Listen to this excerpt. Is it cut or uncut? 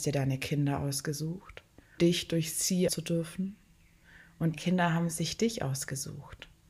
cut